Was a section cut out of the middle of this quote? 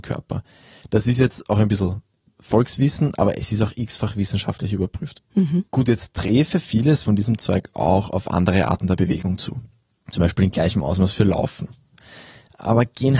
no; 0 cuts

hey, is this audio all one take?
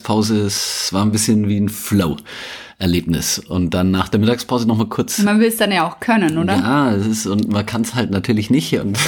yes; 0 cuts

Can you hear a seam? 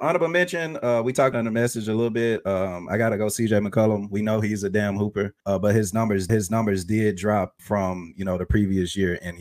yes; 4 cuts; at 1.3 s, 5.4 s, 6.3 s, 7.6 s

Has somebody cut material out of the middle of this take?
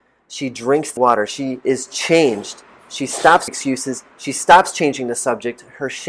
yes; 2 cuts; at 1.0 s, 3.5 s

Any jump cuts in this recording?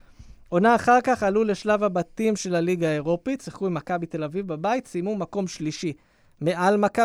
no; 0 cuts

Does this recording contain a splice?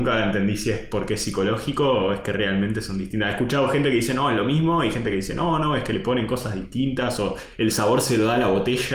no; 0 cuts

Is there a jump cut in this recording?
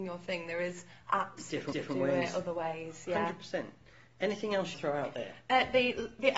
yes; 2 cuts; at 1.7 s, 4.7 s

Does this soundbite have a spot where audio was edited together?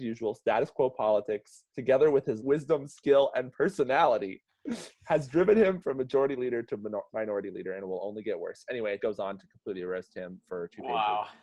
yes; 3 cuts; at 1.7 s, 2.4 s, 9.0 s

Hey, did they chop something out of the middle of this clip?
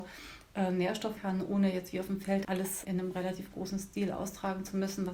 yes; 3 cuts; at 1.2 s, 2.4 s, 2.8 s

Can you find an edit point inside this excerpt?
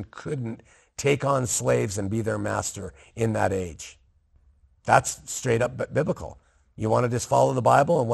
no; 0 cuts

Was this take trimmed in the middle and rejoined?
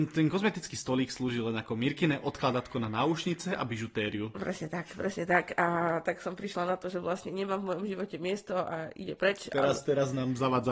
no; 0 cuts

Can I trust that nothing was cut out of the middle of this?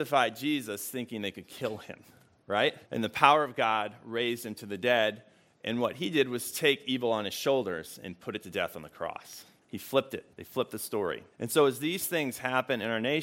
no; 4 cuts; at 2.9 s, 9.6 s, 10.3 s, 11.3 s

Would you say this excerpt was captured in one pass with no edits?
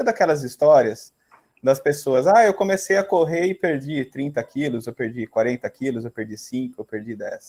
yes; 0 cuts

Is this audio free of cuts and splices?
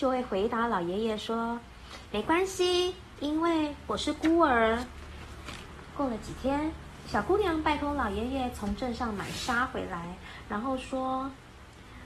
yes; 0 cuts

